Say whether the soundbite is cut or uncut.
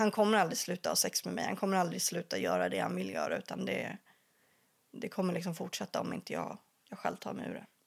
uncut